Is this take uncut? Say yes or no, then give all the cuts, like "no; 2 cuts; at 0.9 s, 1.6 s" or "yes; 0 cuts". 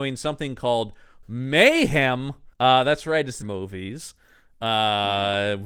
no; 3 cuts; at 1.2 s, 2.5 s, 3.4 s